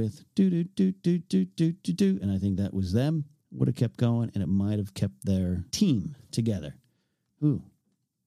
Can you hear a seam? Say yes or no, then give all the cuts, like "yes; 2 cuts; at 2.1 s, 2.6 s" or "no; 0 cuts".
yes; 2 cuts; at 3.4 s, 5.7 s